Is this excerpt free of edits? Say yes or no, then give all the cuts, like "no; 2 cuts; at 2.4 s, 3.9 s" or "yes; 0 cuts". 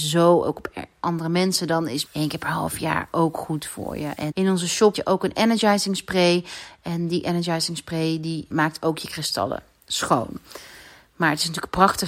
no; 4 cuts; at 2.1 s, 4.3 s, 4.9 s, 8.5 s